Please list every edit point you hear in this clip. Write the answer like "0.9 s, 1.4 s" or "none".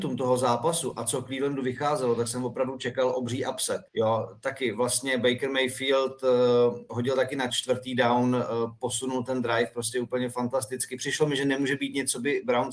3.9 s